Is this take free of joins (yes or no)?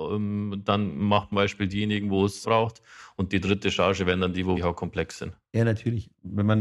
no